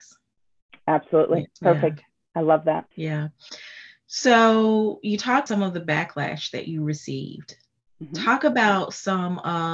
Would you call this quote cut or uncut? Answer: cut